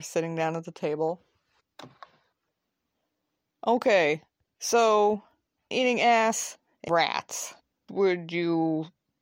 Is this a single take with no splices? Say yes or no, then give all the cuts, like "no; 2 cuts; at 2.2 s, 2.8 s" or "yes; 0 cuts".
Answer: no; 3 cuts; at 5.7 s, 6.9 s, 7.9 s